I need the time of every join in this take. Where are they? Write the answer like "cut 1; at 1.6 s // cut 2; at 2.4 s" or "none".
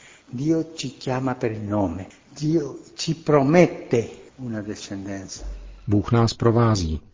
none